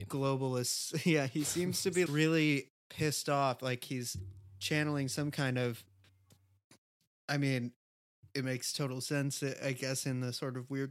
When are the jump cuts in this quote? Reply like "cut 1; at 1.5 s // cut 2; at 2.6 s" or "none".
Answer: cut 1; at 2.1 s